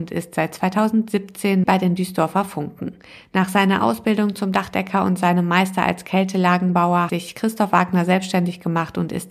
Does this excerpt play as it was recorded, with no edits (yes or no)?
no